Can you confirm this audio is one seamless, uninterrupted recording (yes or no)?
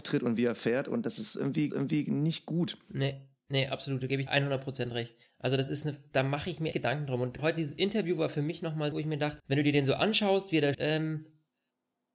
no